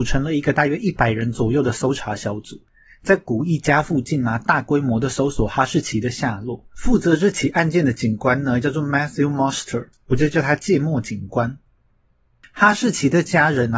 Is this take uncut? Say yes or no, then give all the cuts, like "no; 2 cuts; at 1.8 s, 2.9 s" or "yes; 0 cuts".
yes; 0 cuts